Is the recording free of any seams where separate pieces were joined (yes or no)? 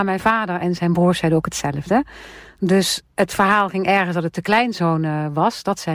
yes